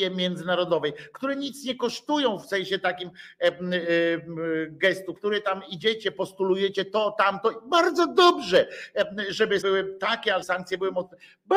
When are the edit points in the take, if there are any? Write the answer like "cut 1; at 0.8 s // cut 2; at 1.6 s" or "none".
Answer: cut 1; at 5.2 s // cut 2; at 9.6 s // cut 3; at 10.4 s